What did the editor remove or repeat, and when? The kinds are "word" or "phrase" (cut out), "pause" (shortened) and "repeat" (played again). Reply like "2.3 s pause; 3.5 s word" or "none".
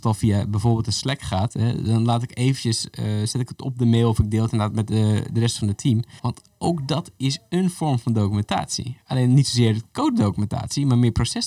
6.2 s pause